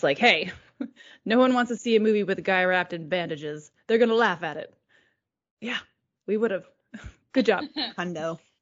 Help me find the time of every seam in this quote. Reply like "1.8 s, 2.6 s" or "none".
none